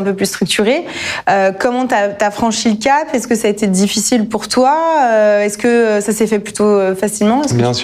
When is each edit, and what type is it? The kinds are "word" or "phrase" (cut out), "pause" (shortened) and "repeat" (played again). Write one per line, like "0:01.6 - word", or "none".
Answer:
none